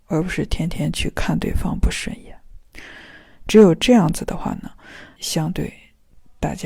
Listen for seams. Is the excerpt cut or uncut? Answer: cut